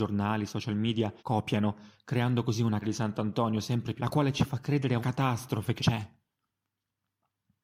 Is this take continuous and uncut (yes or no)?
no